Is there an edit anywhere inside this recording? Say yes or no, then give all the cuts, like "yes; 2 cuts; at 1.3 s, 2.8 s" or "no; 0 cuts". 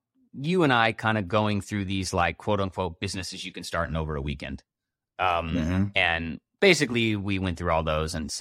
no; 0 cuts